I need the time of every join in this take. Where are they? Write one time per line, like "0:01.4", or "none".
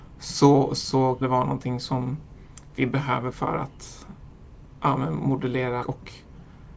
0:01.2
0:03.3
0:05.8